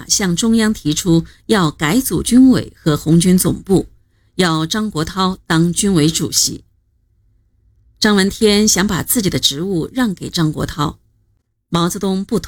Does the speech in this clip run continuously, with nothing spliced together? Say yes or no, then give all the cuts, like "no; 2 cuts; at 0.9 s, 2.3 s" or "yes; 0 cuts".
yes; 0 cuts